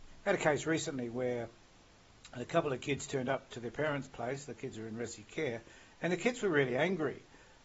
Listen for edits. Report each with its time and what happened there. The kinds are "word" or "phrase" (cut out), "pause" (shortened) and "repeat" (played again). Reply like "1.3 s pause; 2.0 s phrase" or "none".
none